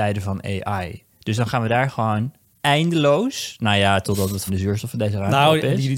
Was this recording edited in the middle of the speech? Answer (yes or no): yes